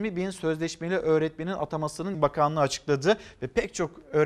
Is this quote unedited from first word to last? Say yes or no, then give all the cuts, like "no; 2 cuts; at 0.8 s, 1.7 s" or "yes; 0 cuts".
no; 1 cut; at 2.1 s